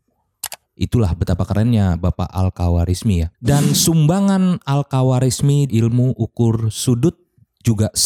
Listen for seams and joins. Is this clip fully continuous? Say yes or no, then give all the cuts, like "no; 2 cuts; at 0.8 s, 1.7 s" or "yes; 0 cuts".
no; 2 cuts; at 3.3 s, 5.7 s